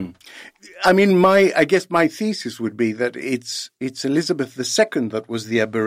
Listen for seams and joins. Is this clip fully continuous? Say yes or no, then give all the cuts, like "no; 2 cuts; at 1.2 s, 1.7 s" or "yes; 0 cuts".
yes; 0 cuts